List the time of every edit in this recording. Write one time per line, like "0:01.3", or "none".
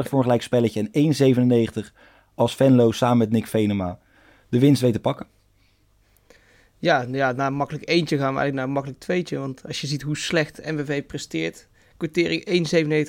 none